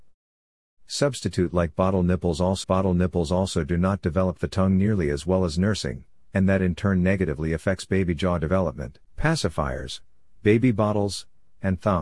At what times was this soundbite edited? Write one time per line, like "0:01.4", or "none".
0:02.6
0:09.0